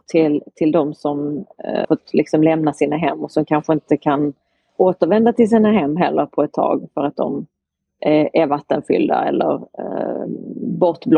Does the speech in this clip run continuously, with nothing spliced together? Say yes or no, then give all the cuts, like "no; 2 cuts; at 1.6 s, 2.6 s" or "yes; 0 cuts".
no; 1 cut; at 1.8 s